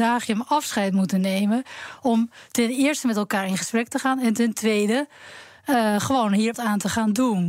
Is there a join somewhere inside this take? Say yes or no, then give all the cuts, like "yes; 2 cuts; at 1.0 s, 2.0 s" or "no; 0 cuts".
yes; 1 cut; at 6.5 s